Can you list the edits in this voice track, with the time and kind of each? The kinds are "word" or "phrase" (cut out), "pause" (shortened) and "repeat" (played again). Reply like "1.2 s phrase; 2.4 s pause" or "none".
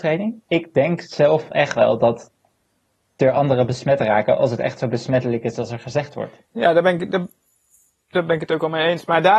none